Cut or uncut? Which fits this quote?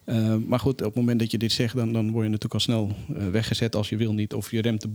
uncut